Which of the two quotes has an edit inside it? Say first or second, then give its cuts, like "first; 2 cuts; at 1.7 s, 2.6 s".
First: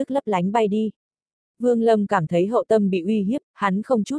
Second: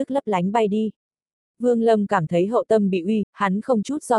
second; 1 cut; at 3.2 s